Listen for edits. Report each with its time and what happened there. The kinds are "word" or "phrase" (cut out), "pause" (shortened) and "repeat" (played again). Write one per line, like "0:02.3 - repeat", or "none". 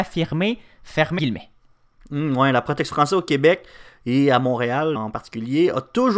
0:01.2 - word
0:02.9 - word
0:05.0 - word